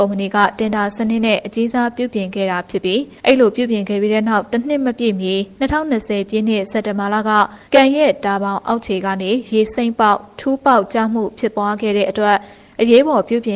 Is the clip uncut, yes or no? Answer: no